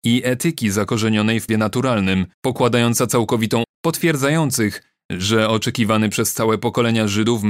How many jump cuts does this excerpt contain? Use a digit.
3